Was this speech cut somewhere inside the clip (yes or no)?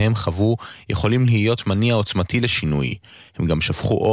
no